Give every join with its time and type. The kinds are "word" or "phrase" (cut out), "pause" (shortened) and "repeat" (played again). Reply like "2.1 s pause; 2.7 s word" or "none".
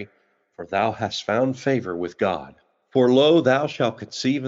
none